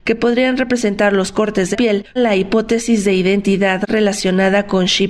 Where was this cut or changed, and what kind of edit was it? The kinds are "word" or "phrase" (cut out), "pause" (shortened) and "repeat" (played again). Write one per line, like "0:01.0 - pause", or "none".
0:01.7 - word
0:02.2 - word